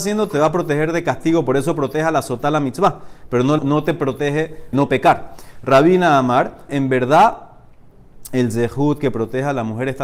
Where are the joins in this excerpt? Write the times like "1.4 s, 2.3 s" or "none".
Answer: 3.6 s, 4.7 s, 6.7 s